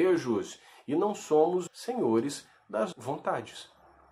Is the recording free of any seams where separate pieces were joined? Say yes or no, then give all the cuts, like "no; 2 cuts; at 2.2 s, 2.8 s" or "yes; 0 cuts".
no; 2 cuts; at 1.7 s, 2.9 s